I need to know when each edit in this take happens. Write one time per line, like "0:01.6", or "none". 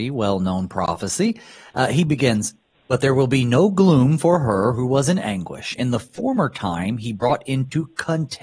none